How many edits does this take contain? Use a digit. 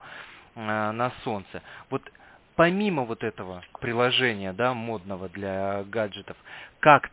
0